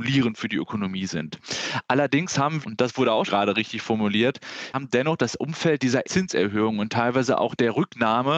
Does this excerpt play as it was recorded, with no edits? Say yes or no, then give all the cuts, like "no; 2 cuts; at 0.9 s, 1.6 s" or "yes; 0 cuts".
no; 4 cuts; at 2.6 s, 3.3 s, 4.7 s, 6.0 s